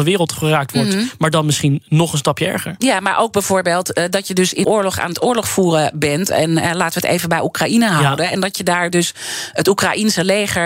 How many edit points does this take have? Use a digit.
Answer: 1